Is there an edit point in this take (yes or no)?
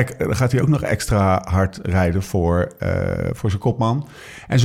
no